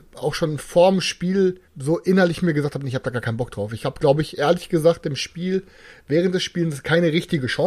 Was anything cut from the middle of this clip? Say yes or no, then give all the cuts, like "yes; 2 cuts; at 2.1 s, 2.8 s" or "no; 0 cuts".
yes; 1 cut; at 1.7 s